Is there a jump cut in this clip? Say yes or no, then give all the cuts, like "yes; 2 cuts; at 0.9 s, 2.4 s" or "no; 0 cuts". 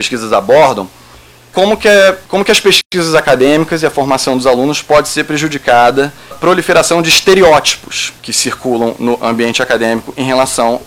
yes; 4 cuts; at 1.5 s, 2.2 s, 6.3 s, 8.2 s